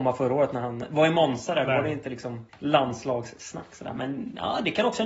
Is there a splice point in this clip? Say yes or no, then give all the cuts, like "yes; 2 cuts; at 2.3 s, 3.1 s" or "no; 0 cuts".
yes; 1 cut; at 2.5 s